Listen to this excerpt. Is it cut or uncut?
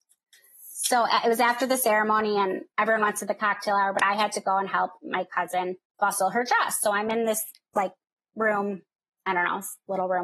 uncut